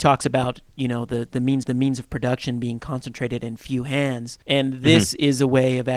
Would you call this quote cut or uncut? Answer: cut